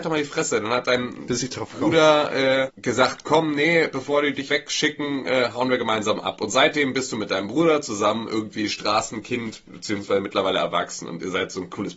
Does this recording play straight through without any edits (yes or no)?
no